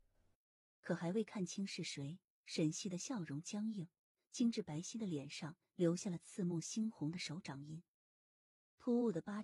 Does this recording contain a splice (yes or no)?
no